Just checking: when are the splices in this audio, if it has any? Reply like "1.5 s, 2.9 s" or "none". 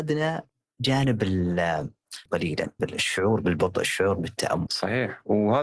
2.3 s, 2.8 s, 4.7 s